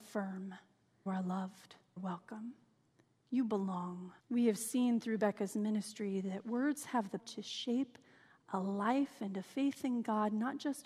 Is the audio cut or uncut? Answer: cut